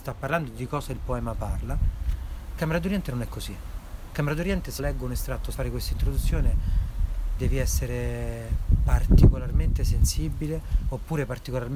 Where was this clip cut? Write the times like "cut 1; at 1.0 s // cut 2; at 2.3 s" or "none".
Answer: cut 1; at 2.6 s // cut 2; at 4.8 s // cut 3; at 5.5 s // cut 4; at 7.4 s